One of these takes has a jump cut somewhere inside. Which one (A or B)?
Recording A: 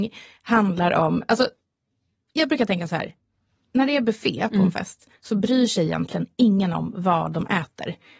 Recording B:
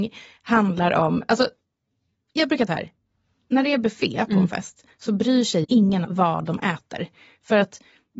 B